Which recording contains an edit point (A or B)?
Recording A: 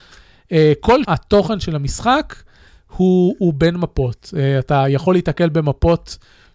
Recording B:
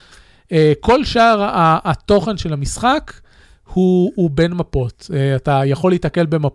A